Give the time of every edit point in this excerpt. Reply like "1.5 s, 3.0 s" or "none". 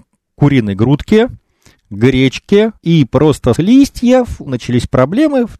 2.8 s, 3.6 s, 4.5 s